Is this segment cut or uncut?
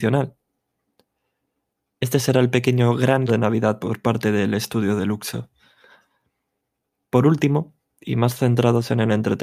cut